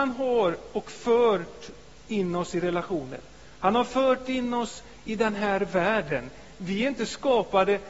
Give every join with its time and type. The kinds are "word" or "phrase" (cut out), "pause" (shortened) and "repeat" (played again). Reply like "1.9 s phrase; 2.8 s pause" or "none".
none

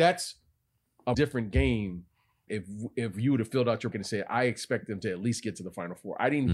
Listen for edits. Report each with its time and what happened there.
1.1 s word; 2.5 s word; 3.9 s word

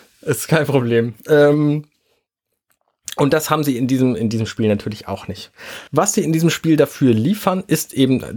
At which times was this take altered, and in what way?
1.2 s pause; 5.9 s pause

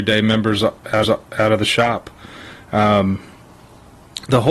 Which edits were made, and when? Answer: 1.0 s repeat

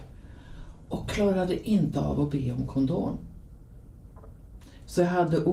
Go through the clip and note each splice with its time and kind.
none

